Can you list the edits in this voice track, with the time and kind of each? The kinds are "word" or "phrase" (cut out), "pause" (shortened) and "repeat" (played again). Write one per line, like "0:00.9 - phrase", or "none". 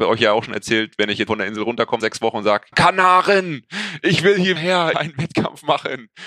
0:01.3 - word
0:02.0 - word
0:02.7 - word
0:04.6 - word
0:04.9 - phrase